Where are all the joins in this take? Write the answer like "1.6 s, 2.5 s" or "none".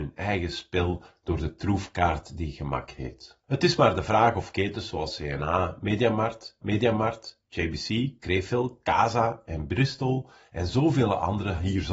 3.4 s, 6.6 s